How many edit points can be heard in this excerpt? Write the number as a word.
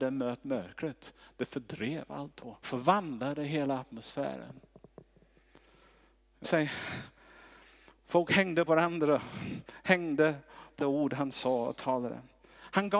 four